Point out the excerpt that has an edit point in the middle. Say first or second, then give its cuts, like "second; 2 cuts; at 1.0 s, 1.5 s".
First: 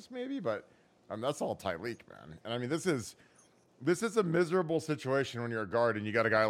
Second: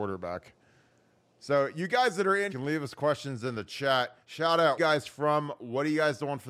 second; 3 cuts; at 2.5 s, 4.2 s, 4.8 s